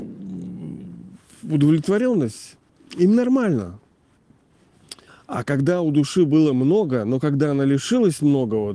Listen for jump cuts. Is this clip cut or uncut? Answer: cut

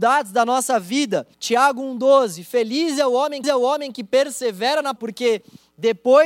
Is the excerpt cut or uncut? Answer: cut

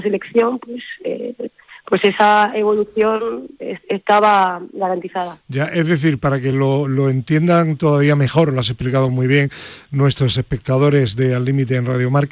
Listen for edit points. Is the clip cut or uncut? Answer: uncut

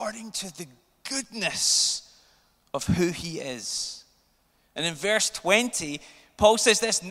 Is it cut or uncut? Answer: uncut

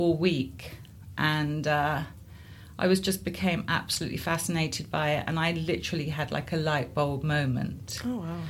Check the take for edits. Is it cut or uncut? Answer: uncut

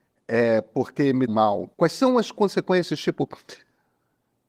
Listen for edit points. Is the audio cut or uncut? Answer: cut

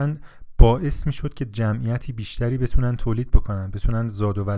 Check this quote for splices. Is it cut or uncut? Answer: uncut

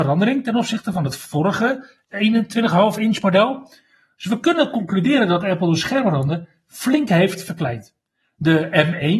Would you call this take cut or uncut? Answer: uncut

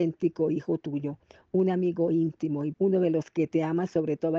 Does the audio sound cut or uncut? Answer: cut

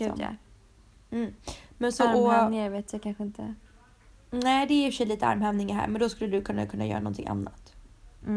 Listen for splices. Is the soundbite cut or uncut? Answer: uncut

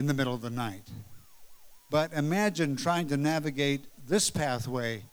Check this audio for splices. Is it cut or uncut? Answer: uncut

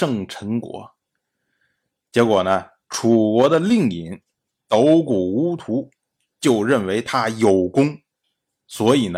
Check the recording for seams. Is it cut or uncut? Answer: uncut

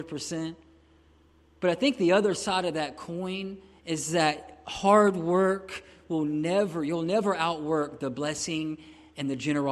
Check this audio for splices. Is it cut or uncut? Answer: uncut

